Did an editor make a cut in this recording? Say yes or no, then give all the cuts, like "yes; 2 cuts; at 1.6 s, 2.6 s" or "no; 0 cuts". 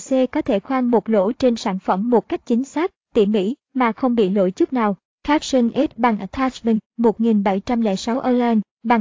no; 0 cuts